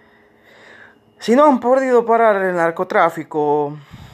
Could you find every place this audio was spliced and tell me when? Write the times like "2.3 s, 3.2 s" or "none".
none